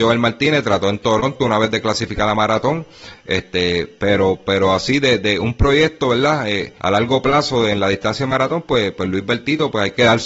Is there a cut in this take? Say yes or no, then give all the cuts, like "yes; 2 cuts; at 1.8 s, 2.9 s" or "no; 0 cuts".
yes; 1 cut; at 6.8 s